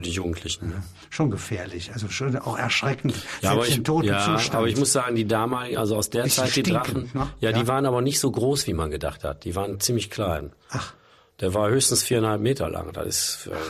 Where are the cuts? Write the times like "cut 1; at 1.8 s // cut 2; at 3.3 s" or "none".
none